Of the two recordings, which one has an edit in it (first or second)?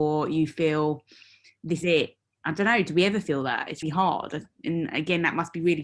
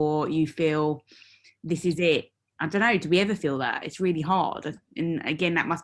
first